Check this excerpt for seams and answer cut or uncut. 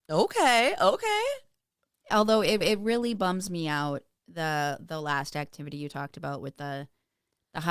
cut